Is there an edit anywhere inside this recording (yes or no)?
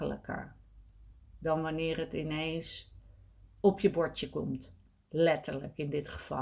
no